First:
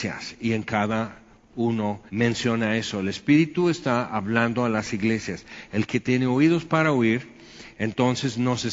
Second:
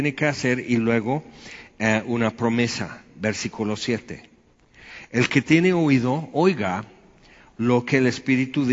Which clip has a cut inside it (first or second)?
first